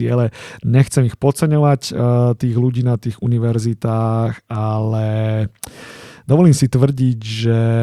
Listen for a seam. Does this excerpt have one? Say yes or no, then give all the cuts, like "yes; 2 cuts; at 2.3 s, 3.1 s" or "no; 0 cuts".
no; 0 cuts